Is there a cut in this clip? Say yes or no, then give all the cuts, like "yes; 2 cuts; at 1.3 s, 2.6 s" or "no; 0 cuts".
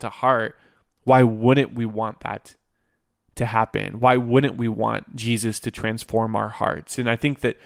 no; 0 cuts